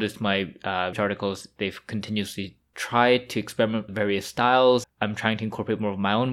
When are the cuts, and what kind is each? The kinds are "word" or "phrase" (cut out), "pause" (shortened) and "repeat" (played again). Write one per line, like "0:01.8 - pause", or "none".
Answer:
0:00.9 - word
0:02.7 - word
0:03.9 - word
0:04.8 - word